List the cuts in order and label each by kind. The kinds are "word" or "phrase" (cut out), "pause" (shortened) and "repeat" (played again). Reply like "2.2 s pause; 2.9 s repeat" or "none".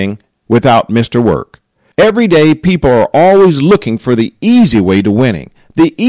none